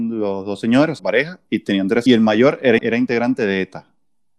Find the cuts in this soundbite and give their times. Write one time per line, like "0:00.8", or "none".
0:01.0
0:02.1
0:02.8